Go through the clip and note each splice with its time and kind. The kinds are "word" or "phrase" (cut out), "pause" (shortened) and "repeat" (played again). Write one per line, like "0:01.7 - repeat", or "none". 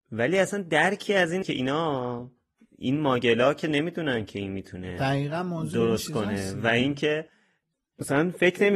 0:01.4 - word